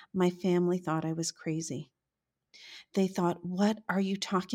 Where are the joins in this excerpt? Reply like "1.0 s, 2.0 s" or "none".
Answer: none